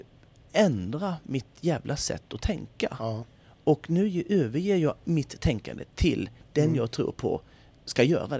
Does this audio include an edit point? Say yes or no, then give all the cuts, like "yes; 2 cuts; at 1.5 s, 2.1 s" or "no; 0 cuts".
no; 0 cuts